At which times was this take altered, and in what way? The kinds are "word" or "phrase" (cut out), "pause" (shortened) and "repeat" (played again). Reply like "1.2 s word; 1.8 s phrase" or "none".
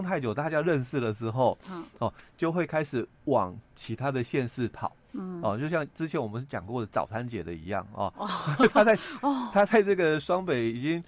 3.1 s pause